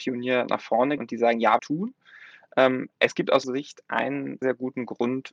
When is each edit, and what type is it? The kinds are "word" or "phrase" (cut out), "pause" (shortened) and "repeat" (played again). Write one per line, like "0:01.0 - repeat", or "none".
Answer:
0:01.0 - word
0:01.6 - phrase
0:03.4 - word
0:04.4 - word